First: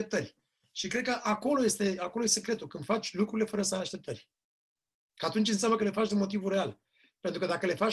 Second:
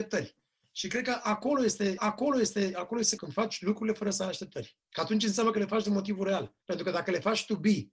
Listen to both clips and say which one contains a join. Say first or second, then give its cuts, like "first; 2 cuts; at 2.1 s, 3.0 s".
second; 4 cuts; at 2.0 s, 3.2 s, 4.8 s, 6.6 s